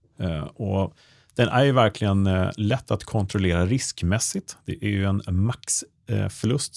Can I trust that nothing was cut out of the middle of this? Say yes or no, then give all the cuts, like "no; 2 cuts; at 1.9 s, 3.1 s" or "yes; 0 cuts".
yes; 0 cuts